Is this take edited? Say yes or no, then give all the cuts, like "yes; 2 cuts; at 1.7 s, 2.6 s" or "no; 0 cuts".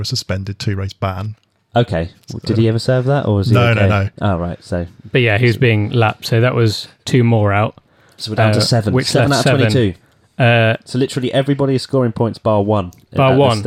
no; 0 cuts